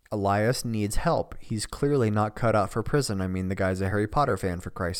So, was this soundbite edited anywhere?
no; 0 cuts

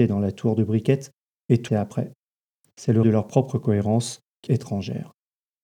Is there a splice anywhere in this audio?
yes; 3 cuts; at 1.7 s, 3.0 s, 4.5 s

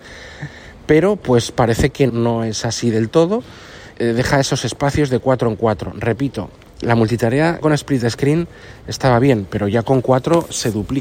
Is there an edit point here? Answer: yes; 4 cuts; at 2.1 s, 3.9 s, 6.8 s, 7.6 s

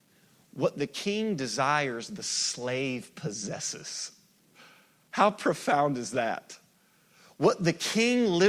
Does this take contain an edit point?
no; 0 cuts

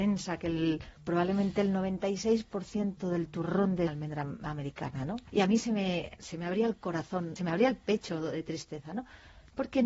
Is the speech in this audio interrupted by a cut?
yes; 4 cuts; at 0.9 s, 3.9 s, 5.3 s, 7.4 s

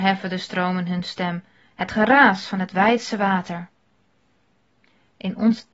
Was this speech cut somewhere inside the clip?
no; 0 cuts

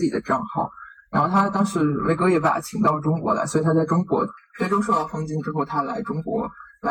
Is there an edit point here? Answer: no; 0 cuts

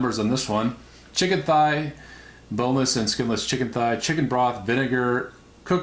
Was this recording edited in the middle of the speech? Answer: no; 0 cuts

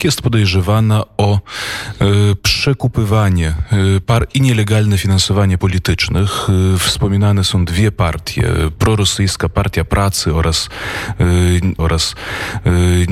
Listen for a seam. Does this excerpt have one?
yes; 2 cuts; at 5.6 s, 11.8 s

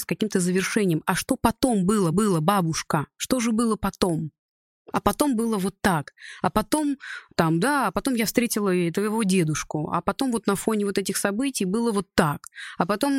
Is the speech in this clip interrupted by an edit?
yes; 1 cut; at 2.1 s

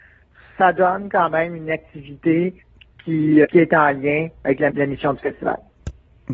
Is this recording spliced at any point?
yes; 2 cuts; at 3.4 s, 4.7 s

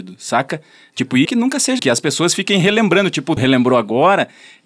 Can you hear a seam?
yes; 3 cuts; at 1.2 s, 1.8 s, 3.4 s

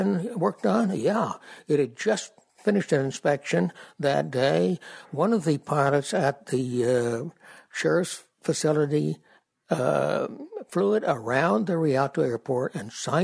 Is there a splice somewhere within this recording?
no; 0 cuts

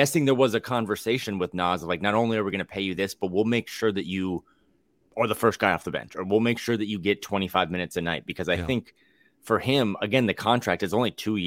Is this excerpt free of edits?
yes; 0 cuts

